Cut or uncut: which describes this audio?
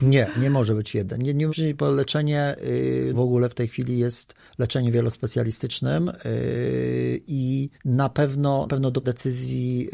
cut